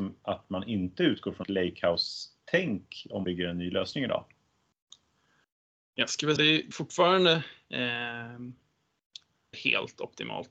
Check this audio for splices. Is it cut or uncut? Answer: cut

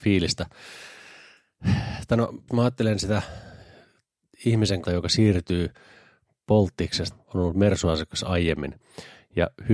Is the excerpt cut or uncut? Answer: cut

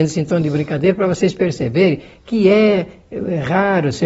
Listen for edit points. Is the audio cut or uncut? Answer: uncut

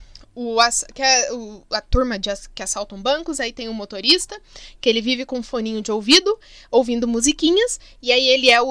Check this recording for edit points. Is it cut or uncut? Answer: uncut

